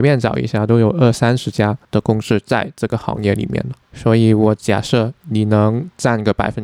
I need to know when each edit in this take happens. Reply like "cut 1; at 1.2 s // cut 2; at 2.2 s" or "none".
cut 1; at 1.8 s // cut 2; at 3.8 s // cut 3; at 5.2 s